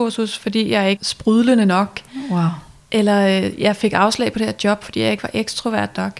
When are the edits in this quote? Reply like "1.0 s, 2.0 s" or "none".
1.0 s